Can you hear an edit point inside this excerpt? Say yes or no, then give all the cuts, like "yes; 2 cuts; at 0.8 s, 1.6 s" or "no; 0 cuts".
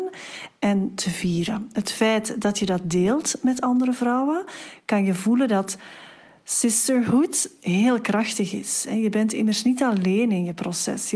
no; 0 cuts